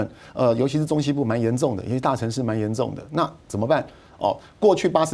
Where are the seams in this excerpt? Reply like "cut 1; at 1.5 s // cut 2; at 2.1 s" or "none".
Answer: none